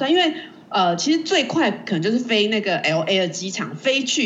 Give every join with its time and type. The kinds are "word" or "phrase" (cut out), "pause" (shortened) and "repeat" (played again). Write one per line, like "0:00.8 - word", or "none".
none